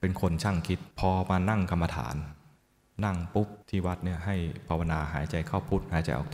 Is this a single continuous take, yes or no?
no